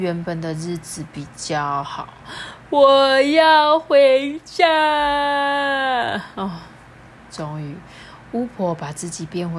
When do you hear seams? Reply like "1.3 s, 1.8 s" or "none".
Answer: none